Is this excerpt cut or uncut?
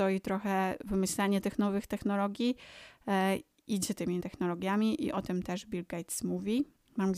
cut